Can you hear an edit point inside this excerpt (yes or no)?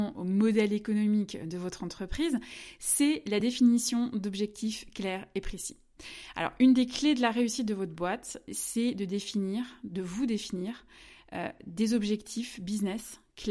no